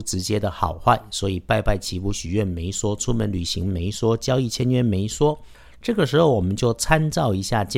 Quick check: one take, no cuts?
yes; 0 cuts

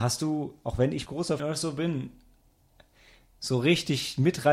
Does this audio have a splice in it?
yes; 2 cuts; at 1.1 s, 1.4 s

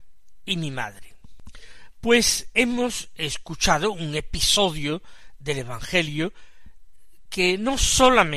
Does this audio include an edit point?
no; 0 cuts

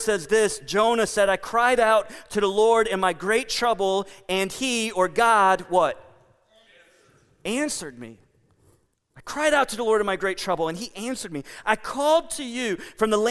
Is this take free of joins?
yes; 0 cuts

